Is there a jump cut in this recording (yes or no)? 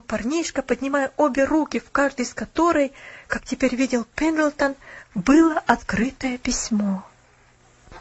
no